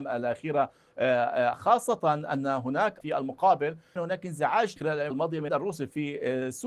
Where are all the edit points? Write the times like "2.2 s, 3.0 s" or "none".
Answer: 1.5 s, 3.0 s, 4.0 s, 4.8 s, 5.1 s, 5.5 s